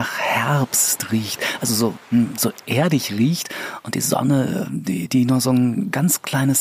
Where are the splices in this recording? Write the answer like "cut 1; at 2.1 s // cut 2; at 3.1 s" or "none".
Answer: none